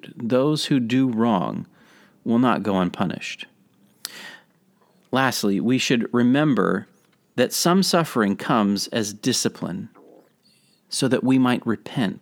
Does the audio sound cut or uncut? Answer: uncut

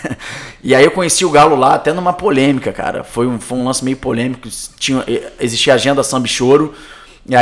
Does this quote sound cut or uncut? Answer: uncut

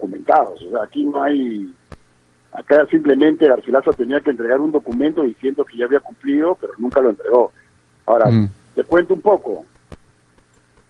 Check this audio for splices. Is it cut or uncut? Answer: uncut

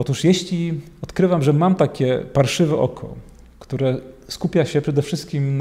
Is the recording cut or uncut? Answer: uncut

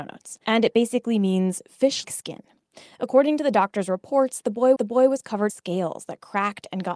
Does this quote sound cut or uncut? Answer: cut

